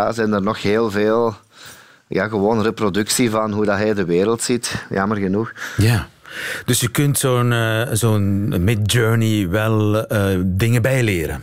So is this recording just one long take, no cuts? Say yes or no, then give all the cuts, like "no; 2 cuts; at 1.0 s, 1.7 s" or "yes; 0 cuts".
yes; 0 cuts